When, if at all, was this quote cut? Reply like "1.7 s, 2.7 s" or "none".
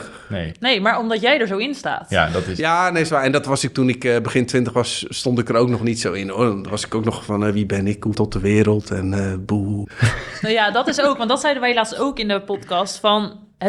8.1 s